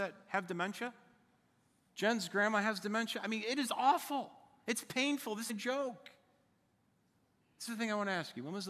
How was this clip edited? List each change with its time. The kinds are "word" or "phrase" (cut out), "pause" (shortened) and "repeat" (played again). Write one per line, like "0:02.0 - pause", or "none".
0:05.5 - word
0:07.7 - word